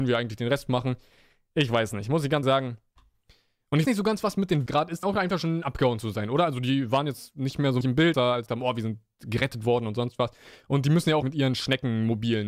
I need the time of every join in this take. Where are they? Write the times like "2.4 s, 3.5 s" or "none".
2.4 s, 3.8 s, 4.7 s, 5.0 s, 7.8 s, 8.1 s, 8.5 s, 11.2 s